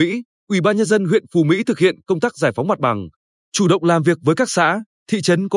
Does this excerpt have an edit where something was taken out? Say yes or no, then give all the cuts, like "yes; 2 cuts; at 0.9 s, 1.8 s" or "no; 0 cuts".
no; 0 cuts